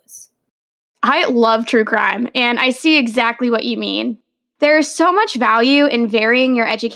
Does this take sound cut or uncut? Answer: uncut